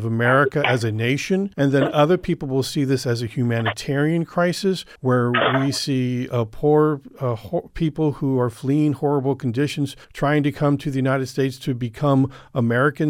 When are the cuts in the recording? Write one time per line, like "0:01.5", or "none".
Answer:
0:01.5
0:05.0
0:10.0